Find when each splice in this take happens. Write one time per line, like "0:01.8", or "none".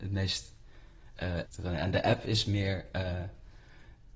0:01.5